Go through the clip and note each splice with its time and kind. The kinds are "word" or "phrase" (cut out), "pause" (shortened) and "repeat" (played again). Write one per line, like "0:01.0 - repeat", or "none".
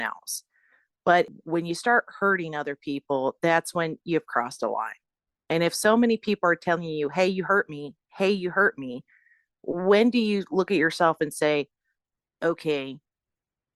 none